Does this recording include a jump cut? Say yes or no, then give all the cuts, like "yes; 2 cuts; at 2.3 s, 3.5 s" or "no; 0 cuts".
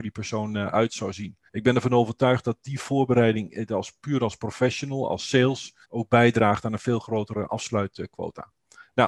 yes; 2 cuts; at 1.5 s, 5.8 s